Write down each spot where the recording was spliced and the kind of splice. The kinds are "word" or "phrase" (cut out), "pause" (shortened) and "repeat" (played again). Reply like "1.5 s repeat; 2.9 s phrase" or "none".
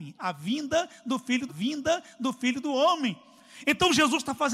1.5 s repeat